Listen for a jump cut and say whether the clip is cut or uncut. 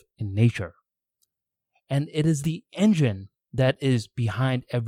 uncut